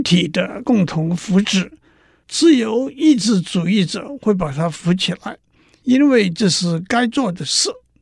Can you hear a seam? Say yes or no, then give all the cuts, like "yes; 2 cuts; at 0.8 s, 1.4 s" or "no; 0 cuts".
no; 0 cuts